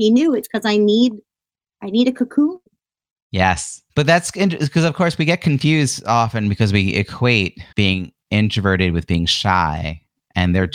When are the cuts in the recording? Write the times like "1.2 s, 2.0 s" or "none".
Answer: 3.9 s, 7.7 s